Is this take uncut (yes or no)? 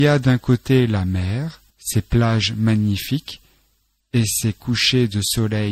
no